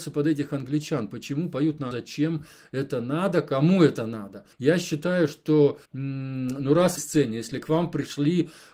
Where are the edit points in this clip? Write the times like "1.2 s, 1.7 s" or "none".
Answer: 1.9 s, 4.5 s, 5.8 s, 7.0 s